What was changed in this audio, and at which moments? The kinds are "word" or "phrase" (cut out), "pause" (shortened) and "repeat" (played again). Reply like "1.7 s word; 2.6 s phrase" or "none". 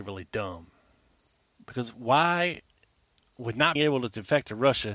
3.8 s word